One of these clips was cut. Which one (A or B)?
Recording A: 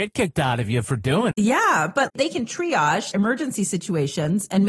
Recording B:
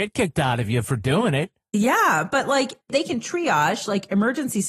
A